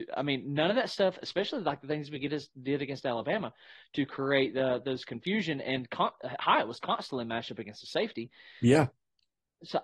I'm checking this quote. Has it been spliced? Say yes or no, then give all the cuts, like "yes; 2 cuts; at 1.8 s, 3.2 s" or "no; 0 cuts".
no; 0 cuts